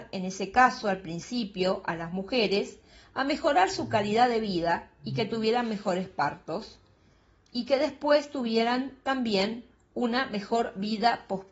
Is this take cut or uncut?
uncut